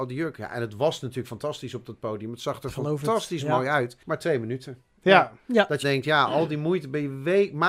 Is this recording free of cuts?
no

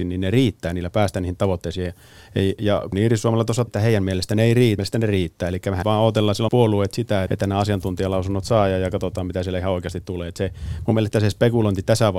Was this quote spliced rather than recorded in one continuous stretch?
yes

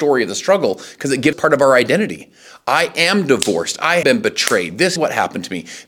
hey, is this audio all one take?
no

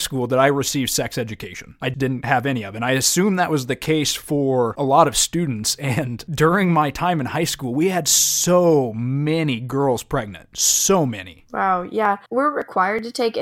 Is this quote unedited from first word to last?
no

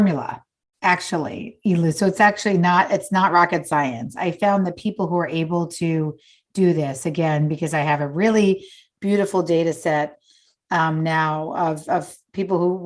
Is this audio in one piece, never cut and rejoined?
yes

